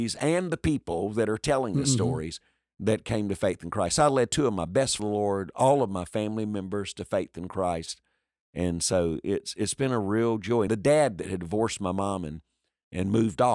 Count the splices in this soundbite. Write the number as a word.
two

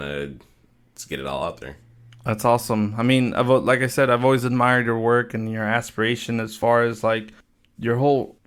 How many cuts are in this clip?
zero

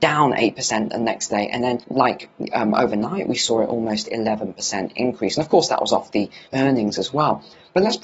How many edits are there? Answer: two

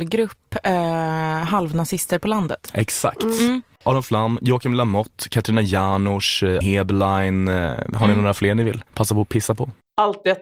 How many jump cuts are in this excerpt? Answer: two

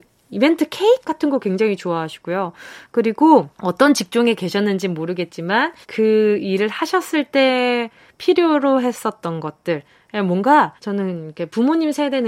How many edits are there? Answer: three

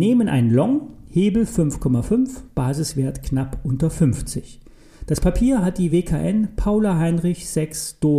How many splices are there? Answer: zero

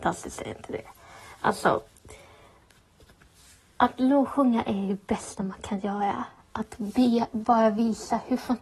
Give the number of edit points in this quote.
one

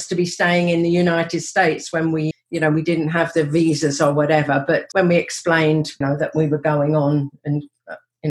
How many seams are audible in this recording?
three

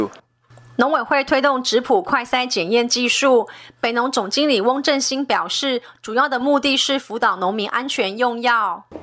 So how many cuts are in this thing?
zero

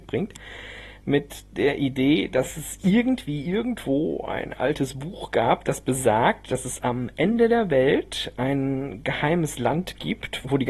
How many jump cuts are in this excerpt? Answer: zero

